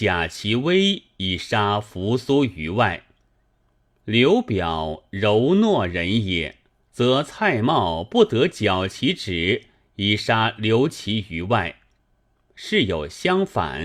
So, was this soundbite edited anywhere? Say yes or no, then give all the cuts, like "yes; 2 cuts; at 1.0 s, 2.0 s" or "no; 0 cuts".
yes; 1 cut; at 6.8 s